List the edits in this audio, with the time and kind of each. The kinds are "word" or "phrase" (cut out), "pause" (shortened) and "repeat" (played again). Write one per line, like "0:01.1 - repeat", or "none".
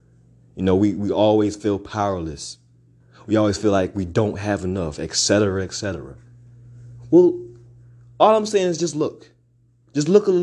none